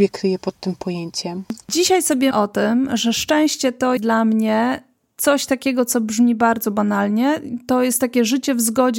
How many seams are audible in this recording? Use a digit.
2